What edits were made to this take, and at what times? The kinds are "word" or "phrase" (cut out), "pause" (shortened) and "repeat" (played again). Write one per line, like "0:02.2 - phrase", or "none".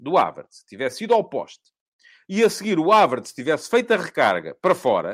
none